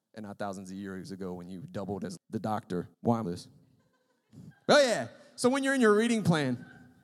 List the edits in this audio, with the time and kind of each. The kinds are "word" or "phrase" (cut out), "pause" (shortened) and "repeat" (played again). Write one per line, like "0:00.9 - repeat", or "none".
0:02.2 - word
0:02.9 - pause
0:03.2 - phrase